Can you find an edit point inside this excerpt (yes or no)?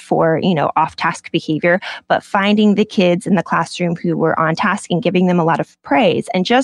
no